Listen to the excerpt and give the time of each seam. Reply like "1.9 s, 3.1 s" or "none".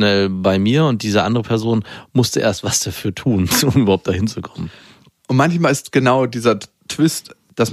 none